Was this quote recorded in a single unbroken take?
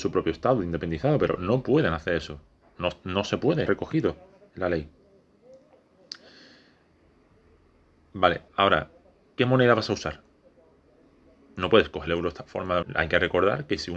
no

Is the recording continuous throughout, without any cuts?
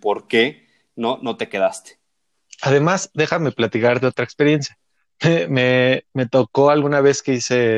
yes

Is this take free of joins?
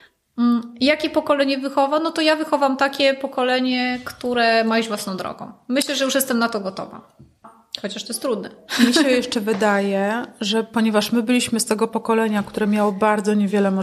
yes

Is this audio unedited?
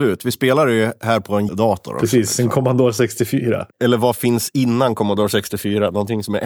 no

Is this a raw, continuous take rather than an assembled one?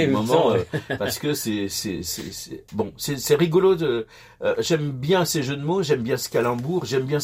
yes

